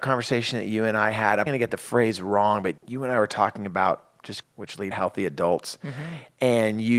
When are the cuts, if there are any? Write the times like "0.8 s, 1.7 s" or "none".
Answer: 1.5 s, 2.8 s, 4.4 s, 4.9 s